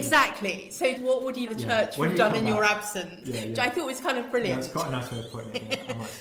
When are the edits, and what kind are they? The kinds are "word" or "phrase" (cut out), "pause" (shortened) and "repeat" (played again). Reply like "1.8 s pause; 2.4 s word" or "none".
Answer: 1.0 s word; 1.5 s word